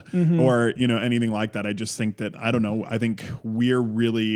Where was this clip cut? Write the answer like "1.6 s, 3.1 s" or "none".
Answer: none